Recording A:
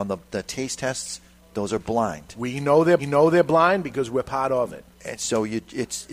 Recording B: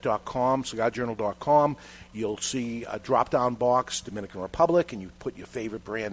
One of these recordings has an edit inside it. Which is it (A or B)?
A